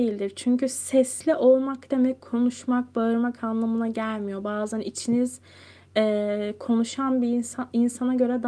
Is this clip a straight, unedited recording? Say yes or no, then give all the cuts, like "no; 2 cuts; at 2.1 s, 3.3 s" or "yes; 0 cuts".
yes; 0 cuts